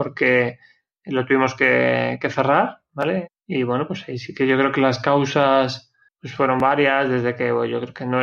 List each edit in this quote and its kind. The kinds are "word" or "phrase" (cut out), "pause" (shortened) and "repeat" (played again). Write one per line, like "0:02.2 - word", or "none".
0:03.4 - pause
0:06.1 - pause